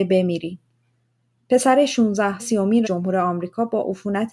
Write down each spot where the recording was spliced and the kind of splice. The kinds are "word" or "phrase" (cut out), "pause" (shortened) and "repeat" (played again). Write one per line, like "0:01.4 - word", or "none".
0:02.4 - word
0:02.8 - word